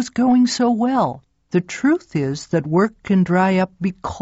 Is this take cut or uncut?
cut